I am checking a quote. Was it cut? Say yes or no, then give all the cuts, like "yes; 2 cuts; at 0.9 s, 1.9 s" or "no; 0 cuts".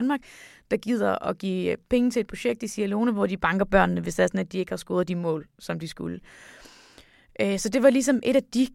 no; 0 cuts